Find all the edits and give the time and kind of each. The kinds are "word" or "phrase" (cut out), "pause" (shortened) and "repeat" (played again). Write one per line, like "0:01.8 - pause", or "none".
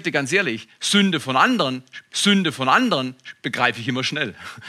0:02.1 - repeat